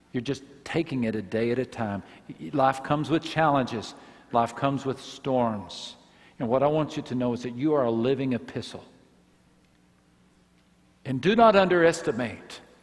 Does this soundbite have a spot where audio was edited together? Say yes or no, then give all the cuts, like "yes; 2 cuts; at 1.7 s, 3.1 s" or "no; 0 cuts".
no; 0 cuts